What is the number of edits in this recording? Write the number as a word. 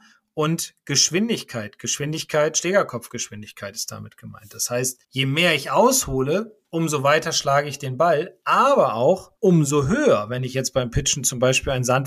three